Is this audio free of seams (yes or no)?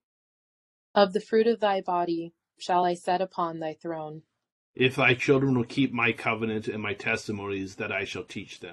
yes